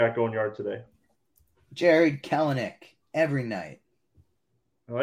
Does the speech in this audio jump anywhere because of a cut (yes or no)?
no